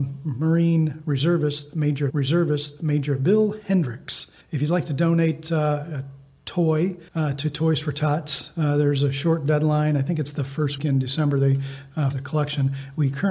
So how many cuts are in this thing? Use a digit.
5